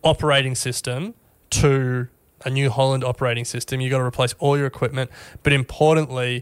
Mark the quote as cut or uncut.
uncut